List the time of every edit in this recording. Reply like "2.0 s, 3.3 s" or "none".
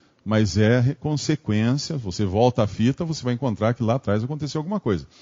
none